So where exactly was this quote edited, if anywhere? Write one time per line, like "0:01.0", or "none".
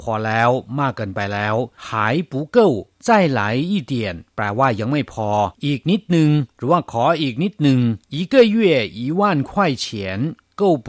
0:01.8
0:02.9
0:04.3
0:05.6
0:08.0